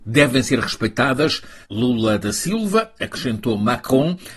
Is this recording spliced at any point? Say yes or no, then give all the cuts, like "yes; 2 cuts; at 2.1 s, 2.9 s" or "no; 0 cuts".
yes; 1 cut; at 1.6 s